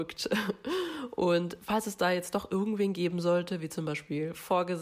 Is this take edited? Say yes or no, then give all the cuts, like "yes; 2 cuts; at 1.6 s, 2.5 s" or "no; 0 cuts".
no; 0 cuts